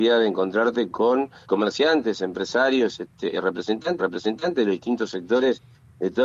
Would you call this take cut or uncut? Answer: cut